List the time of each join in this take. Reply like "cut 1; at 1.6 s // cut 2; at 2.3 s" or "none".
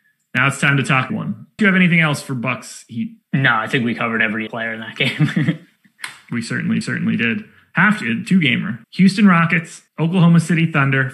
cut 1; at 1.1 s // cut 2; at 1.6 s // cut 3; at 3.2 s // cut 4; at 4.5 s // cut 5; at 6.8 s // cut 6; at 8.8 s // cut 7; at 9.9 s